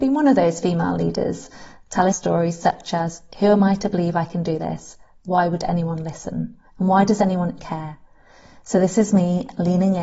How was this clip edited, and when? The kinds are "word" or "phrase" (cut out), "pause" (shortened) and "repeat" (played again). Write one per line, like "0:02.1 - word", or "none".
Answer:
0:02.1 - word
0:06.7 - pause
0:07.6 - word